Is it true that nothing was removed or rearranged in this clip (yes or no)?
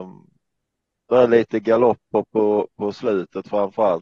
yes